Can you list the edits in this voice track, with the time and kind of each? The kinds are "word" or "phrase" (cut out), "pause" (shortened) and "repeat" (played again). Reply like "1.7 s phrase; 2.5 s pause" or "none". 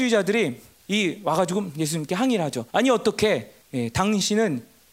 2.7 s pause; 3.6 s pause